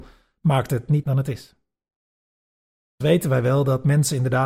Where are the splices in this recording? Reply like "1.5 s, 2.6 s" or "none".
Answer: 1.0 s, 3.0 s